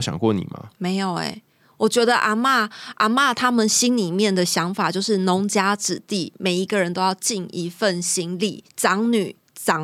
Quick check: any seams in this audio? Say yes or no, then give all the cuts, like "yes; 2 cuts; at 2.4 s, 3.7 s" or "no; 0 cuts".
no; 0 cuts